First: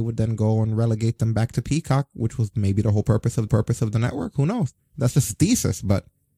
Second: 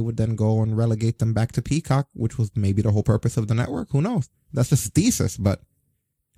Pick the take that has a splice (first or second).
first